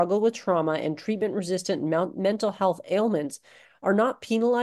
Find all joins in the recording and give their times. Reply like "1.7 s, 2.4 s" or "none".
none

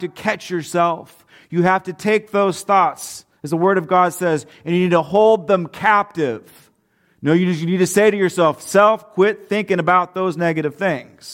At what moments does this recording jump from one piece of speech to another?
none

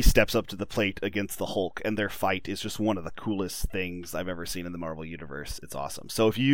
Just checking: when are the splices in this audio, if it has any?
5.6 s

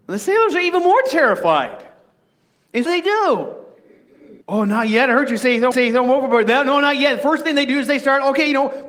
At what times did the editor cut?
2.9 s, 4.4 s, 5.7 s

